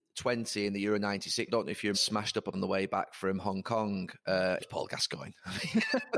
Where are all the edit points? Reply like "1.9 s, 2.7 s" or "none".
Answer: 1.5 s, 1.9 s, 2.5 s, 4.6 s